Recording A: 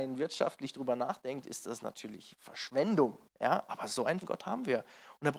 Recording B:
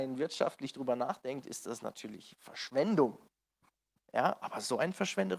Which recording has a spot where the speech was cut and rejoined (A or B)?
A